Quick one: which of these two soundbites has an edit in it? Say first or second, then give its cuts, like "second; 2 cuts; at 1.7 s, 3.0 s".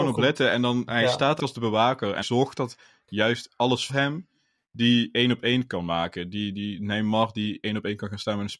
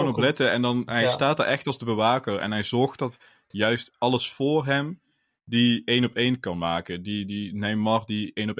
first; 3 cuts; at 1.4 s, 2.2 s, 3.9 s